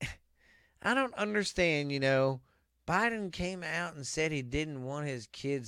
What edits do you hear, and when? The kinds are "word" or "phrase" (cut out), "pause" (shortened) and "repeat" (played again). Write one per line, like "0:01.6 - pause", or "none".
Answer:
0:02.7 - pause

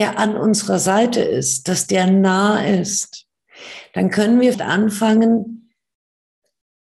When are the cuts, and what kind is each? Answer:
0:04.5 - word

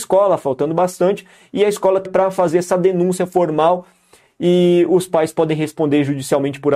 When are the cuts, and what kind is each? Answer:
0:02.1 - word

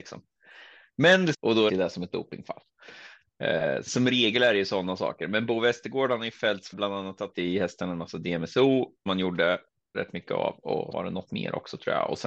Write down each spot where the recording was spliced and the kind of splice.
0:01.3 - word
0:01.7 - word
0:03.9 - word
0:06.7 - word
0:07.3 - word
0:09.1 - word
0:09.9 - word
0:10.9 - word

